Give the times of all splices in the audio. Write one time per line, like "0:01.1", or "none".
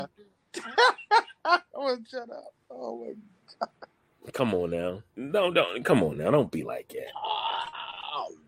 0:03.7
0:05.1